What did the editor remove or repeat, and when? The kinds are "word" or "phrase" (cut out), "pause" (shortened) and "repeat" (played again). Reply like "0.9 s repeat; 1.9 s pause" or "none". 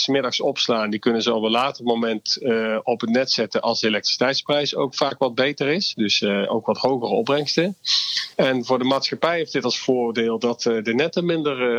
8.3 s pause